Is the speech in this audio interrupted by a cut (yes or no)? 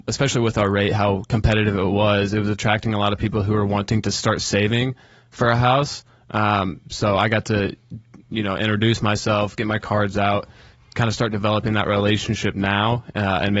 no